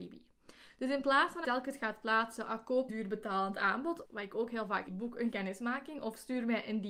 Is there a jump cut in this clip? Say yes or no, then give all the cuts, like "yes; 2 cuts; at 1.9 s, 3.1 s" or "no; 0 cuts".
yes; 5 cuts; at 1.4 s, 2.9 s, 4.0 s, 4.9 s, 5.3 s